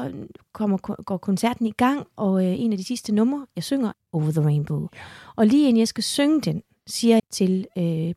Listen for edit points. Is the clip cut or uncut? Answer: cut